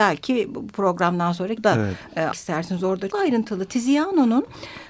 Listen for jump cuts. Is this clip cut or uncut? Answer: cut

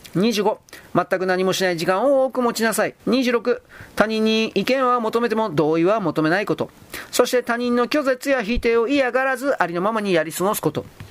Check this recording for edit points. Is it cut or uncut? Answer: cut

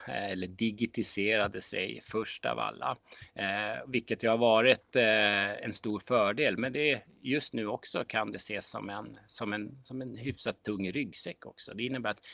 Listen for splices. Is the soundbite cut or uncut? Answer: uncut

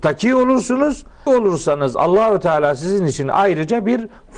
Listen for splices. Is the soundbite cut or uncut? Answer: cut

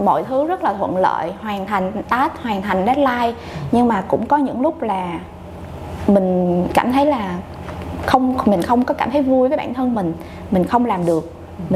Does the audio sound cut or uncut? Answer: uncut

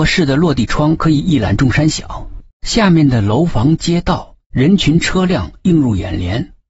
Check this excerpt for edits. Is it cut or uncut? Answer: cut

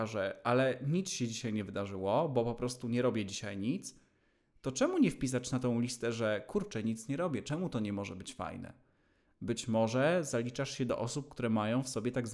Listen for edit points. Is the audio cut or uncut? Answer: uncut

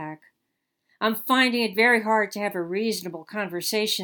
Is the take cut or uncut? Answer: uncut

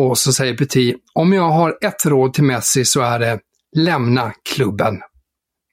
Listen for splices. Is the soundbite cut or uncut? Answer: uncut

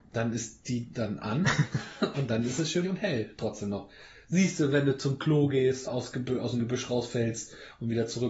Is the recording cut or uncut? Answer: cut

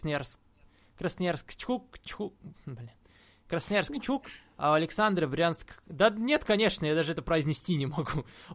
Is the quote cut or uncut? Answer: uncut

